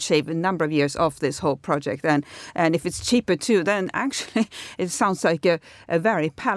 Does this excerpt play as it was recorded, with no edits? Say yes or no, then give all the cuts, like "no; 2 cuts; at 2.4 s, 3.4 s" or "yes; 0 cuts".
yes; 0 cuts